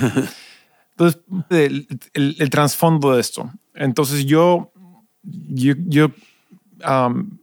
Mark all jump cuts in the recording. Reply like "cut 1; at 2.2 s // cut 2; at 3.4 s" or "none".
cut 1; at 1.5 s